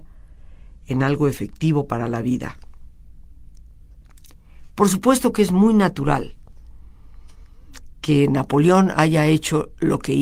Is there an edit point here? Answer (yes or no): no